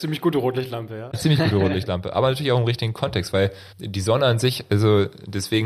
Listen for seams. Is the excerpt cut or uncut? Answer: cut